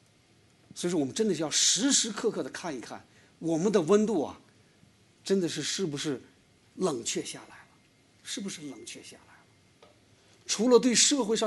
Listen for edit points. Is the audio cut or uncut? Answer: uncut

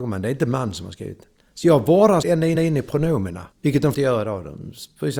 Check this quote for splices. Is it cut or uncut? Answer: cut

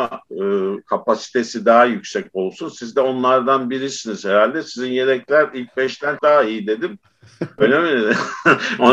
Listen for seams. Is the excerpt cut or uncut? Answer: cut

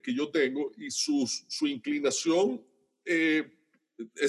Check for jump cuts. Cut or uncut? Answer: uncut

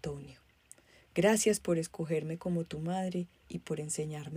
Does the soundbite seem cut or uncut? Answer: uncut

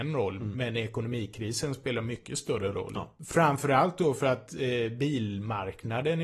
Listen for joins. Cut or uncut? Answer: uncut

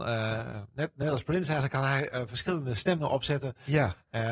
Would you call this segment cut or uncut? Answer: uncut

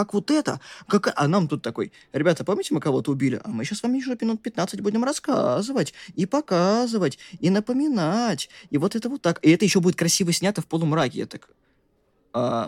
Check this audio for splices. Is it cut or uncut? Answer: uncut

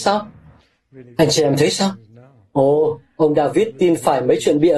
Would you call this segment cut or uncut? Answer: uncut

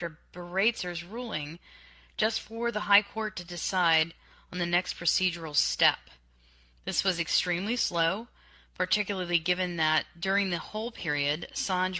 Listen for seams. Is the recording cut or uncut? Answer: uncut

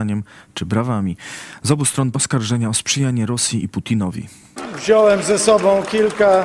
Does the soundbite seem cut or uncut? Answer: cut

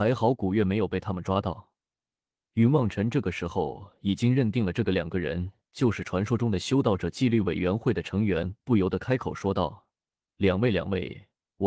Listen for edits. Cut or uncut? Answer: uncut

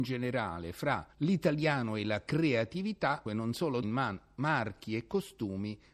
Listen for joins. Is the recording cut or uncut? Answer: cut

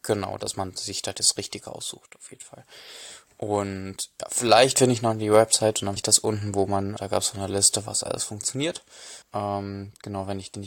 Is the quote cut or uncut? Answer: cut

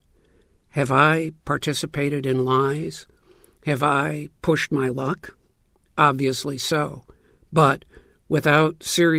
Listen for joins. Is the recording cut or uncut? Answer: uncut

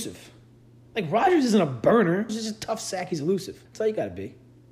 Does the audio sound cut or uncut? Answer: cut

